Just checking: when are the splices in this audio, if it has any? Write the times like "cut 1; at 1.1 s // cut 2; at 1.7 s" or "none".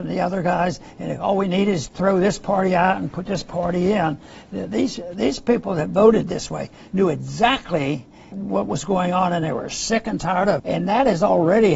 cut 1; at 1.9 s // cut 2; at 8.3 s // cut 3; at 10.6 s